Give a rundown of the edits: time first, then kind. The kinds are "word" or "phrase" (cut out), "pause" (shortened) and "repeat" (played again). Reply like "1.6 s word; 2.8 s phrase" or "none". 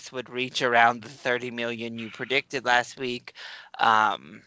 none